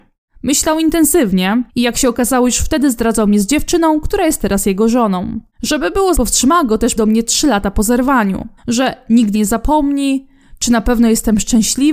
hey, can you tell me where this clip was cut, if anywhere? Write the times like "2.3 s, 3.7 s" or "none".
1.7 s, 5.5 s, 6.1 s, 7.0 s, 8.6 s, 9.3 s

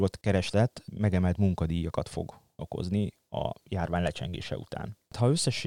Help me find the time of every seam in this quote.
2.6 s

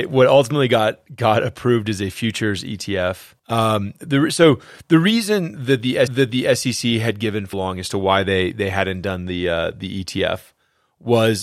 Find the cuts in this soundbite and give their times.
3.4 s, 6.1 s, 7.5 s

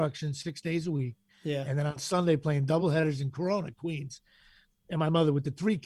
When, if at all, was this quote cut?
none

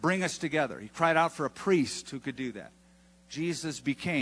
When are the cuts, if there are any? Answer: none

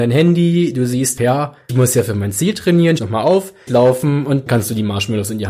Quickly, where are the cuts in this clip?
1.2 s, 1.7 s, 3.0 s, 3.7 s, 4.5 s

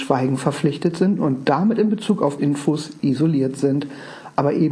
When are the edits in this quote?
2.4 s

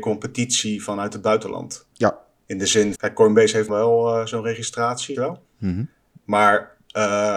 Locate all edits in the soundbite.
1.9 s, 2.9 s, 3.7 s, 5.1 s

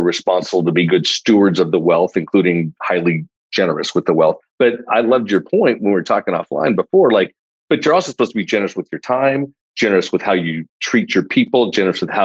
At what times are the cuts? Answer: none

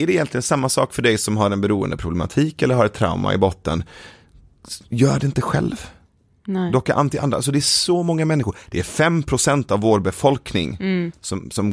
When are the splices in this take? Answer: none

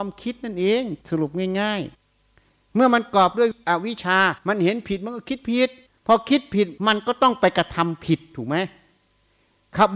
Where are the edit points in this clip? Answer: 1.0 s, 1.9 s, 4.4 s, 5.9 s, 6.8 s

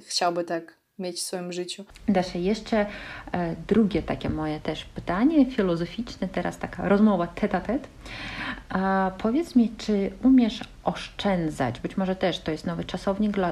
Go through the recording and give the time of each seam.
none

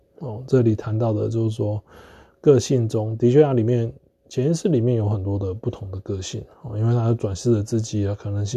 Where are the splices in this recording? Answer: none

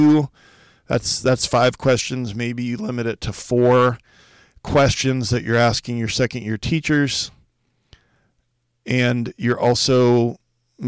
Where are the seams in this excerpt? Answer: none

